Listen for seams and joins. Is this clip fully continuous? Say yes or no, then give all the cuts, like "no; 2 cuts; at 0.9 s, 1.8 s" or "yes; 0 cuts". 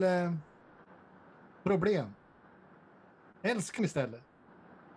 no; 1 cut; at 3.8 s